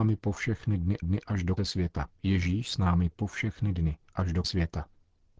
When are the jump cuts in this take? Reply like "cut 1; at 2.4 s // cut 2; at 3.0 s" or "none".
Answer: cut 1; at 1.0 s // cut 2; at 1.6 s // cut 3; at 2.1 s // cut 4; at 3.1 s // cut 5; at 4.1 s // cut 6; at 4.4 s